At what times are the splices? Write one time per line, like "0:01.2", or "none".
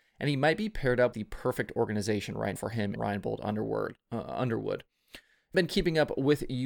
0:01.1
0:02.6
0:03.0
0:05.5